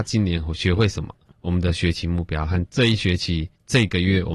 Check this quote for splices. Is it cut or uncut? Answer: uncut